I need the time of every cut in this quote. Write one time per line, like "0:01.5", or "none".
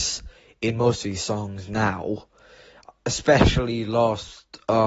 none